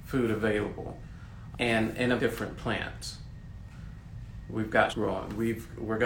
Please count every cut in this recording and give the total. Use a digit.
3